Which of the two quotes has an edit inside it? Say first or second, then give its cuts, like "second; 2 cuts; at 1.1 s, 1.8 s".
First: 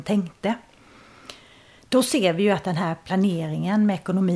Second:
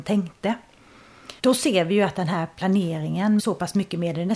second; 2 cuts; at 1.4 s, 3.4 s